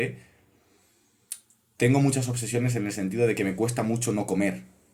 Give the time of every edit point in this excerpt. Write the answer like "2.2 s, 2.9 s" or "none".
none